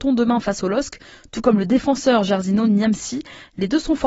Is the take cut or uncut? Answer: uncut